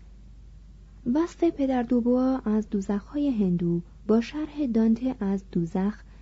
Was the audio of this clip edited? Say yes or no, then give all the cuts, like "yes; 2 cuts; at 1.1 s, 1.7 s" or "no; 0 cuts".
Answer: no; 0 cuts